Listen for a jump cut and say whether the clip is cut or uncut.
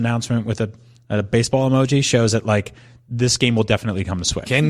uncut